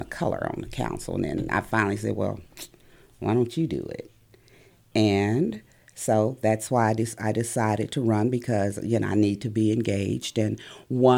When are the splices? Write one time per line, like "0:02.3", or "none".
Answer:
none